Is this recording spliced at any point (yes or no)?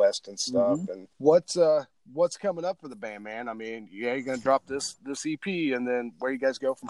yes